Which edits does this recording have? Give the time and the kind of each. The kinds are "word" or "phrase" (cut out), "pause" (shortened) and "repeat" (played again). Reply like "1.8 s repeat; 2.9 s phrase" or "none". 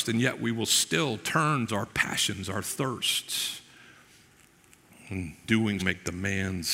1.7 s word; 5.4 s word; 5.8 s word